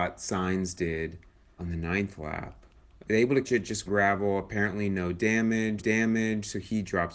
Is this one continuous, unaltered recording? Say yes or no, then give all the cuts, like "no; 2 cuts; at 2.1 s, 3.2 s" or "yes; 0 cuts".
no; 5 cuts; at 1.6 s, 2.8 s, 3.4 s, 3.9 s, 5.8 s